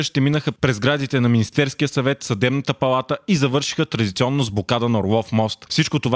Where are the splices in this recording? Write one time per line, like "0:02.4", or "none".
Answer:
none